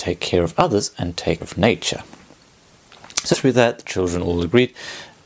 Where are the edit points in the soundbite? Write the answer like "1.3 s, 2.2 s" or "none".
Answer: 1.4 s, 3.3 s